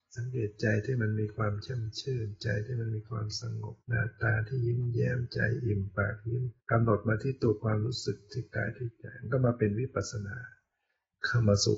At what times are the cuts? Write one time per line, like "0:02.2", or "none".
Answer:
0:03.8
0:06.6